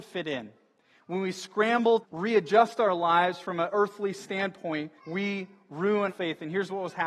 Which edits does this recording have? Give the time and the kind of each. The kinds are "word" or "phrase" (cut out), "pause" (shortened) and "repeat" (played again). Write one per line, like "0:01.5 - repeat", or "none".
0:02.0 - word
0:05.0 - pause
0:06.1 - word